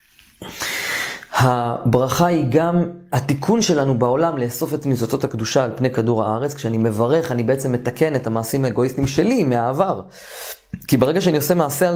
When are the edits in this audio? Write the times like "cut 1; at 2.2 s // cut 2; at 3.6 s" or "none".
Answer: none